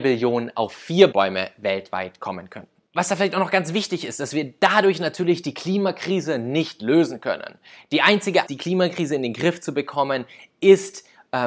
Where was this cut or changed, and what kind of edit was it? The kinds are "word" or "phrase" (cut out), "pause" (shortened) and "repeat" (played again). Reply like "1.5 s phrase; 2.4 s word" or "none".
1.1 s word; 2.9 s pause; 8.5 s word